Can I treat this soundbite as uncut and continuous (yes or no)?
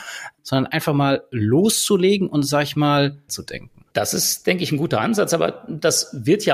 no